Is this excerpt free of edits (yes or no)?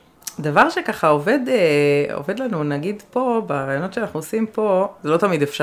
yes